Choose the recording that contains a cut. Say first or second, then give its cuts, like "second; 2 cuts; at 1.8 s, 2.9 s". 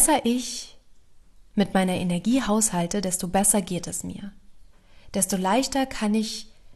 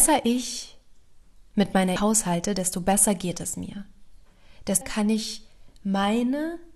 second; 2 cuts; at 2.0 s, 4.8 s